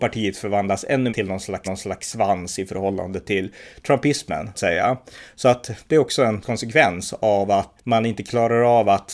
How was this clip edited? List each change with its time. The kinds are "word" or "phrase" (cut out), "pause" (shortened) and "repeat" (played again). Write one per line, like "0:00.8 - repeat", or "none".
0:01.1 - word
0:01.6 - repeat
0:04.5 - phrase
0:06.4 - word
0:07.8 - word